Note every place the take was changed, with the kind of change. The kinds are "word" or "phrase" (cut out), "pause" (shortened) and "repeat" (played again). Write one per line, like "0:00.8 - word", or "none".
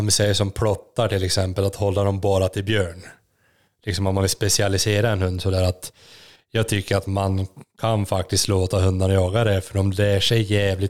none